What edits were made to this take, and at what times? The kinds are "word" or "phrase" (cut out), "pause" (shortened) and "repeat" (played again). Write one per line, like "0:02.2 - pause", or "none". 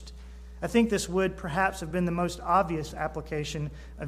none